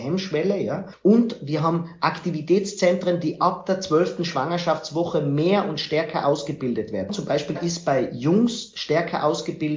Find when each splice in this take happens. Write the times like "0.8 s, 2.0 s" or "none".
7.5 s